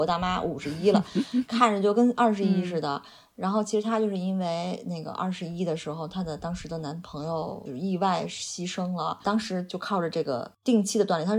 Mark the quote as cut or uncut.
uncut